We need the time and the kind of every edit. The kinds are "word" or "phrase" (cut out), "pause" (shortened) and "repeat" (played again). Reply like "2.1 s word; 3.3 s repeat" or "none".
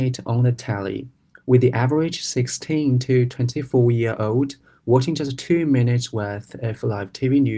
none